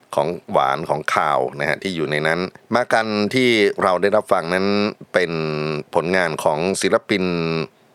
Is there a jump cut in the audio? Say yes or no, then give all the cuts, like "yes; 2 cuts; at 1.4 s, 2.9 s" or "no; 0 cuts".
yes; 1 cut; at 2.6 s